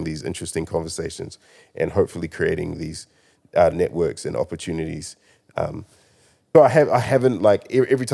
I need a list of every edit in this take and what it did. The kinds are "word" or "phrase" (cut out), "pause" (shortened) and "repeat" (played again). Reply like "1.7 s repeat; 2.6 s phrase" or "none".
6.5 s word